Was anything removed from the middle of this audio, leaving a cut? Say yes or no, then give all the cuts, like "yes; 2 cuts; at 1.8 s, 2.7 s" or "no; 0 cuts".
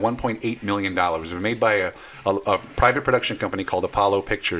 no; 0 cuts